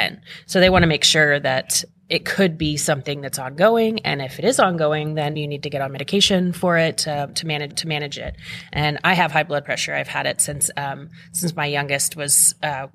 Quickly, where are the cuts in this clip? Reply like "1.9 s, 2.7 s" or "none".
2.0 s, 5.3 s, 7.7 s